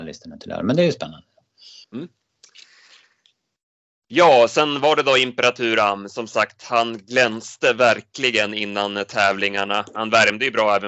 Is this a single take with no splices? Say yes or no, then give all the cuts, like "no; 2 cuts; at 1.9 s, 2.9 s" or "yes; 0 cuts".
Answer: no; 1 cut; at 1.8 s